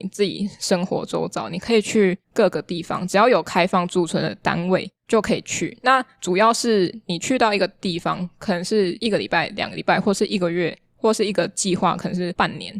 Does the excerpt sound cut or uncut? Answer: cut